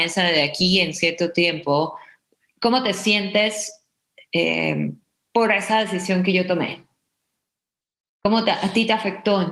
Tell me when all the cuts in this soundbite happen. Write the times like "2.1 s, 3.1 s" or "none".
none

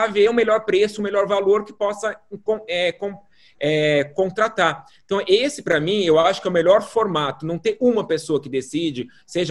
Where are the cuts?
none

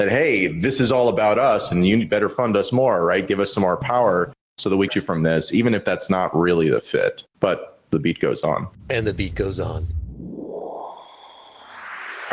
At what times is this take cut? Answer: 4.9 s, 7.3 s

